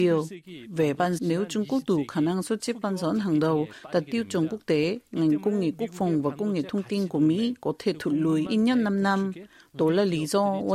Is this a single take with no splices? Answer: no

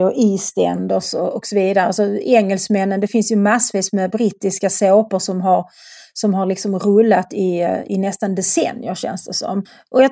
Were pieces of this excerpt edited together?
no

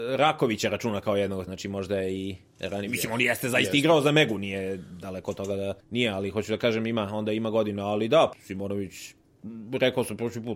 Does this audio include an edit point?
yes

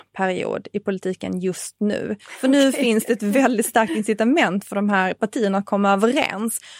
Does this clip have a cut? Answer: no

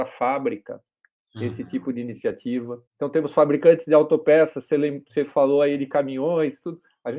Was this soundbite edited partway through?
yes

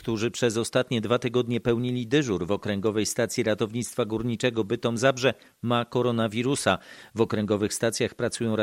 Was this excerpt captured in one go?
yes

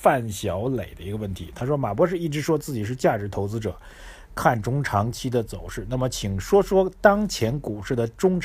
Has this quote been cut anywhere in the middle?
no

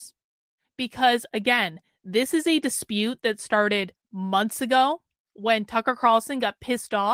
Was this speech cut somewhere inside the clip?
no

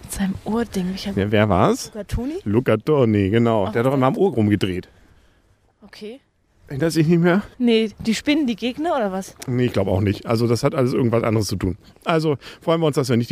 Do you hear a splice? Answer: yes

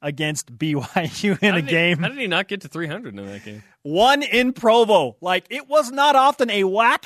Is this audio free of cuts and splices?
yes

